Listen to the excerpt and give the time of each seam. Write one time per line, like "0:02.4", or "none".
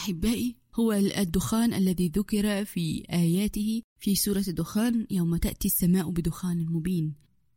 0:03.9